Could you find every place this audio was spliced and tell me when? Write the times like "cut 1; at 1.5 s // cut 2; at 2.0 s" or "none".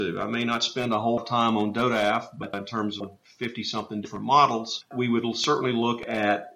cut 1; at 1.2 s // cut 2; at 2.5 s // cut 3; at 3.0 s // cut 4; at 4.9 s

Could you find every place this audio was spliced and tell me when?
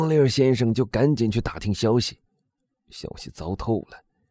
none

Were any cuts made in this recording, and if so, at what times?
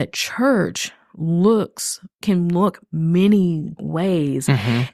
cut 1; at 2.2 s // cut 2; at 3.8 s

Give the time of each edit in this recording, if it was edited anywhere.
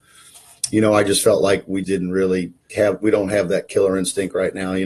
cut 1; at 1.8 s // cut 2; at 2.7 s

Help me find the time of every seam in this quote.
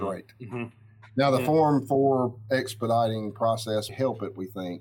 cut 1; at 3.9 s

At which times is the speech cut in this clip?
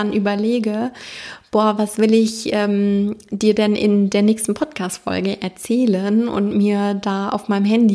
none

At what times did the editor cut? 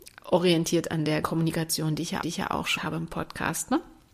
cut 1; at 1.2 s // cut 2; at 2.2 s // cut 3; at 2.8 s

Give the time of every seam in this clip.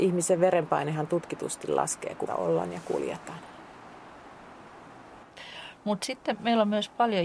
cut 1; at 2.3 s

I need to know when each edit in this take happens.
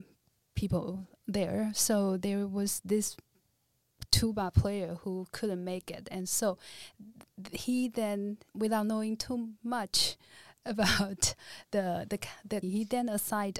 cut 1; at 7.3 s // cut 2; at 8.5 s // cut 3; at 12.6 s

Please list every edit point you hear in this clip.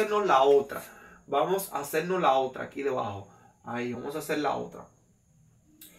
none

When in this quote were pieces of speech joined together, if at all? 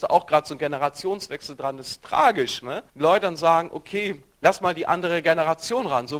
cut 1; at 2.9 s // cut 2; at 4.3 s

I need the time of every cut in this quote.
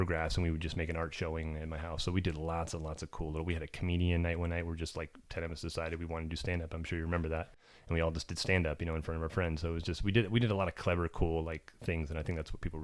none

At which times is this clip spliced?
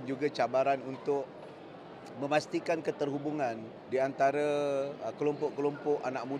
cut 1; at 3.8 s

